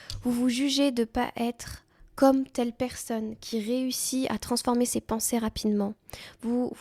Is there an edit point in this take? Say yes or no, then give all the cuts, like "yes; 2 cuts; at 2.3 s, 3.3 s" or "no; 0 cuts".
no; 0 cuts